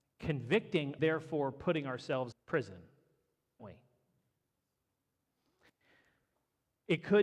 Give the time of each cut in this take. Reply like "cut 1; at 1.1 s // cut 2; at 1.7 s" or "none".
cut 1; at 1.0 s // cut 2; at 2.3 s // cut 3; at 3.6 s